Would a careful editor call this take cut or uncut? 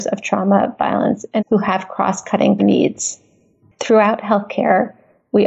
cut